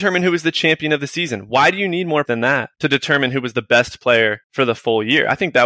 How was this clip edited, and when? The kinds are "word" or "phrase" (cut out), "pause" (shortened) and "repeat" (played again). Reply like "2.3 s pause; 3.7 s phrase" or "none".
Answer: 2.2 s word; 2.7 s pause; 4.4 s pause